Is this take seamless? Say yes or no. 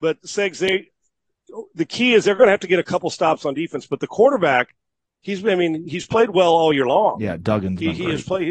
yes